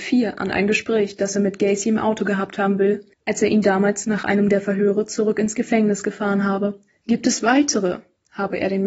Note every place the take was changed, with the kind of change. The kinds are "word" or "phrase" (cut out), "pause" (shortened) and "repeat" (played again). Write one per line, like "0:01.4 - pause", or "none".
0:03.1 - pause
0:06.9 - pause